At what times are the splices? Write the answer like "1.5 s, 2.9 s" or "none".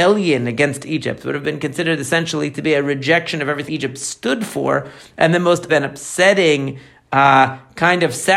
3.7 s, 5.7 s